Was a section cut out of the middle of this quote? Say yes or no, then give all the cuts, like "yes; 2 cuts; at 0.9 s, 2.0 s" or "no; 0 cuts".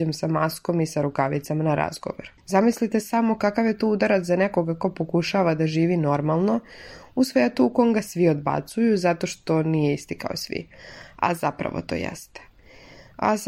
yes; 1 cut; at 2.4 s